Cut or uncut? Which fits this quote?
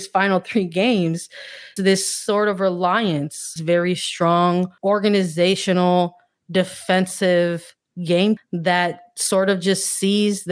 cut